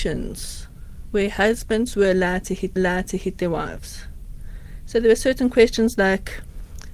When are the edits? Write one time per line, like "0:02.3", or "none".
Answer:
0:02.8